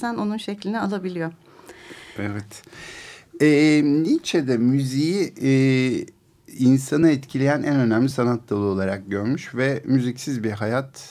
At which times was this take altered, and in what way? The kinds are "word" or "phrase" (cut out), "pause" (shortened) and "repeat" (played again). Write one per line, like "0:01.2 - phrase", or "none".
none